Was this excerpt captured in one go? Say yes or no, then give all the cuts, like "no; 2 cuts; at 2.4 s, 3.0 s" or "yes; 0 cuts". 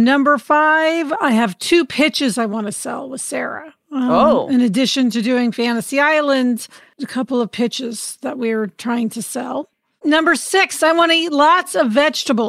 yes; 0 cuts